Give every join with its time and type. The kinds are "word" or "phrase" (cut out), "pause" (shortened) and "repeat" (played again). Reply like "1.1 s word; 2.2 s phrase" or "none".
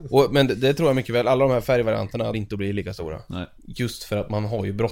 2.3 s phrase